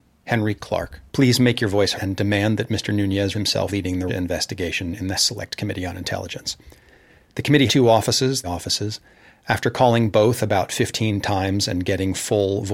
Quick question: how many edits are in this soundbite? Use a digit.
8